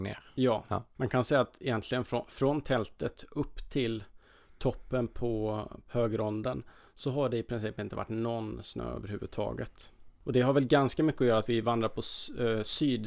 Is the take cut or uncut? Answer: uncut